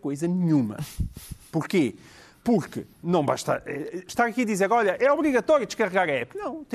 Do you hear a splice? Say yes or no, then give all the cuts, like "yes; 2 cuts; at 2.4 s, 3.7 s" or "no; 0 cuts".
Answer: no; 0 cuts